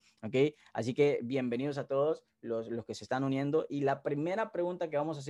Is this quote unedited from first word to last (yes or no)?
yes